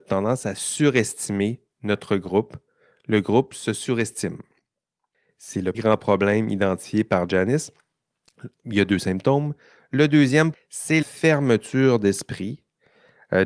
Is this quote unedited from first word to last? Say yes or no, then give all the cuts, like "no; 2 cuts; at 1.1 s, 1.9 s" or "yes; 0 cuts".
no; 3 cuts; at 5.7 s, 10.5 s, 11.0 s